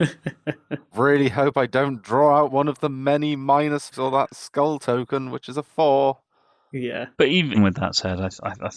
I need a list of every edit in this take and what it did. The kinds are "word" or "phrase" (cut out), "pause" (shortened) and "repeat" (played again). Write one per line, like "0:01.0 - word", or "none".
0:00.9 - word
0:03.9 - word
0:07.1 - pause
0:07.5 - word